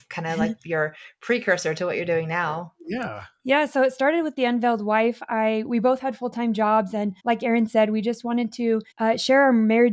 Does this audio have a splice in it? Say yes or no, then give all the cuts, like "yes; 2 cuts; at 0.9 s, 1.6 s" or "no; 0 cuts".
yes; 2 cuts; at 7.2 s, 8.9 s